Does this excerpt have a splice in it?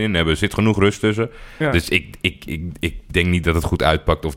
no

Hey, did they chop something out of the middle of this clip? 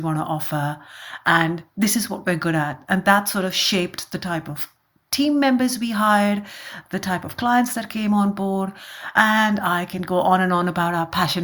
no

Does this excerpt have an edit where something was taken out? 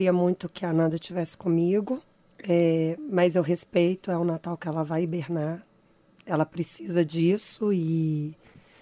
no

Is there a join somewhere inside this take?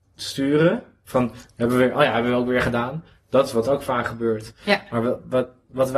no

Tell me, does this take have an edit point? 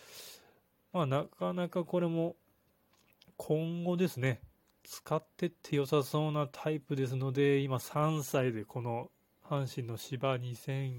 no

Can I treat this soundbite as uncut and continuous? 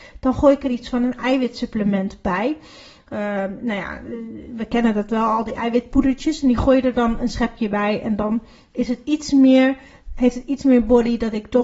yes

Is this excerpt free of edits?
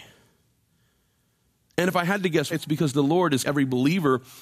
no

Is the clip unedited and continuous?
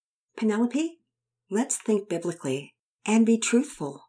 yes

